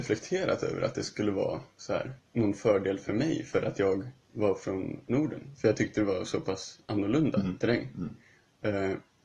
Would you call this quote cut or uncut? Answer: cut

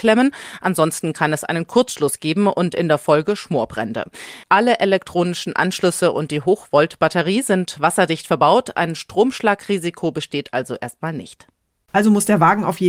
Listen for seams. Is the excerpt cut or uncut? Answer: uncut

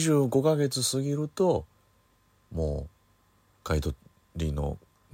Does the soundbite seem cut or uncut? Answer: uncut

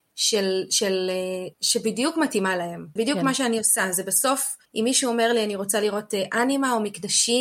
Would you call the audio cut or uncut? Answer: cut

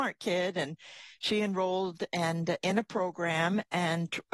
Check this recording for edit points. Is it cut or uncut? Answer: uncut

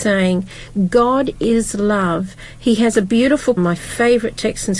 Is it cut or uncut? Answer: cut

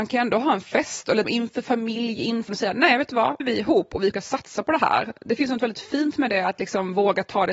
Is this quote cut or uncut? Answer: cut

